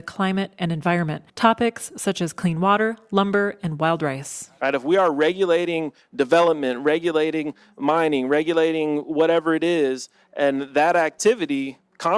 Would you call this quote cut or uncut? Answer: cut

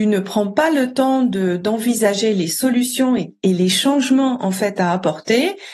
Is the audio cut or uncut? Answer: uncut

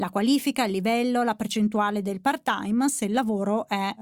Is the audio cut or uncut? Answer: uncut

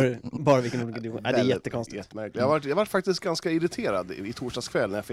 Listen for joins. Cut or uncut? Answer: uncut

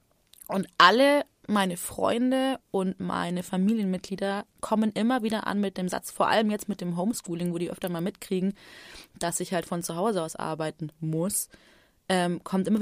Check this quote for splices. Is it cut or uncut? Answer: cut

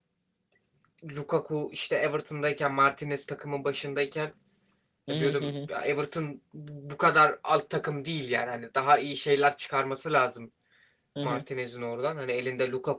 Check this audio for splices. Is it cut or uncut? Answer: uncut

